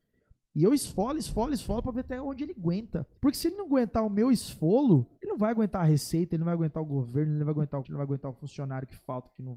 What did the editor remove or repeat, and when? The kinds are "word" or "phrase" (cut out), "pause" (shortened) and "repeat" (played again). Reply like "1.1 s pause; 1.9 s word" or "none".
3.2 s pause; 5.2 s pause; 7.8 s word